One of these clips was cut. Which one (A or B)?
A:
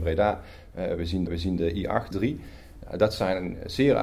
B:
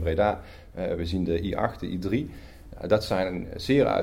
A